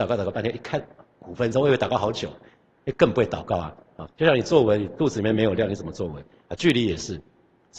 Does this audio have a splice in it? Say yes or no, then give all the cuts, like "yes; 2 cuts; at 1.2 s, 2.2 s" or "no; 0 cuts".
yes; 1 cut; at 4.1 s